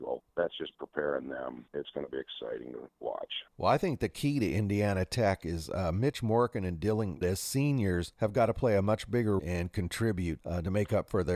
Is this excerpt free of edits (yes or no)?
no